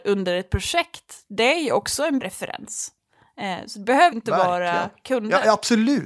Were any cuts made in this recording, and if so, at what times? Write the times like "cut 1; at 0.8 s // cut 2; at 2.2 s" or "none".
cut 1; at 2.2 s // cut 2; at 4.1 s